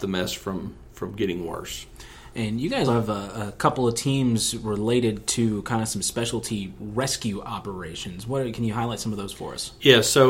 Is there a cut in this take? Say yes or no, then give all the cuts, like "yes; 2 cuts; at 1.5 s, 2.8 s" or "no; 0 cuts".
yes; 1 cut; at 2.9 s